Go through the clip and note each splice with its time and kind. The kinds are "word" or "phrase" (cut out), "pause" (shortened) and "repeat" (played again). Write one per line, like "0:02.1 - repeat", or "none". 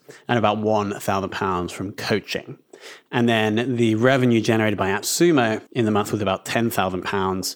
0:05.7 - pause